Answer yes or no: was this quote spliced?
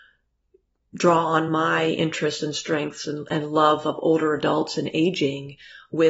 no